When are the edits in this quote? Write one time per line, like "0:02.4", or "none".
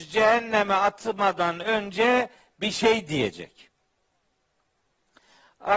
none